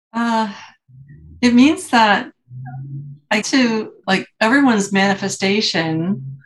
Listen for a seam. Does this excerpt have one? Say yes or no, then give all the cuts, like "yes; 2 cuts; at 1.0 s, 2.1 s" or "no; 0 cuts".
yes; 2 cuts; at 3.4 s, 4.0 s